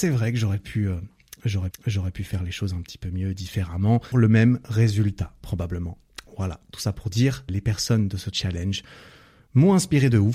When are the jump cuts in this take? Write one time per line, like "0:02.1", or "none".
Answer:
0:01.7
0:04.1
0:07.5
0:08.3

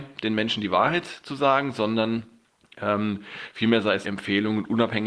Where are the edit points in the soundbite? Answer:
0:02.5
0:04.0

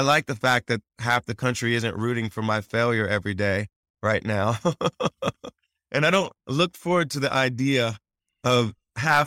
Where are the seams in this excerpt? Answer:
none

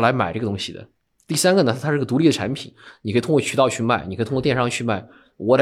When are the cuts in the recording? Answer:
none

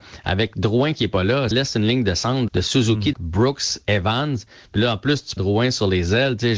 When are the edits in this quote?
0:01.5
0:02.5
0:03.1
0:03.9
0:05.4

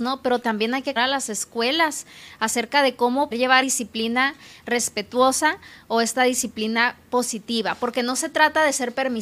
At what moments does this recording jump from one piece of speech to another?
0:01.0
0:03.3
0:03.6

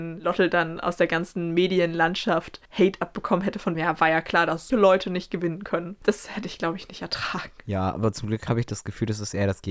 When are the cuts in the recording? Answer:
0:02.6
0:03.7
0:04.7

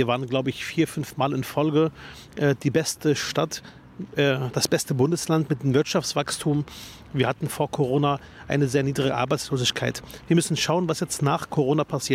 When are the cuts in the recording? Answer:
none

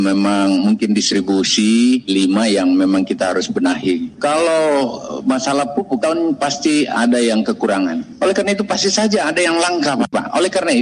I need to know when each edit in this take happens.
0:02.1
0:06.0

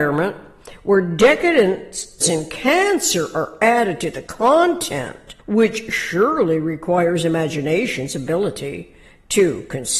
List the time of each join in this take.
0:02.2
0:05.4

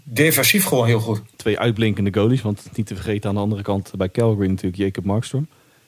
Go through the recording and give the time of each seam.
0:01.3

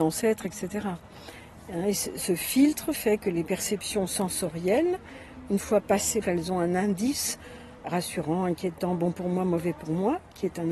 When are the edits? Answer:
0:06.2

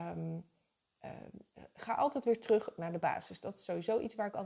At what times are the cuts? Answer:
none

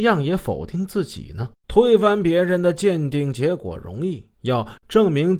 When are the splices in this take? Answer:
0:01.6
0:04.3

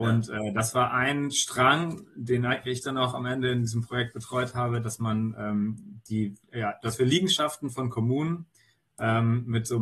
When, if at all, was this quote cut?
0:06.4

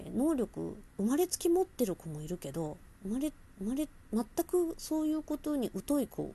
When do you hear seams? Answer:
0:03.5

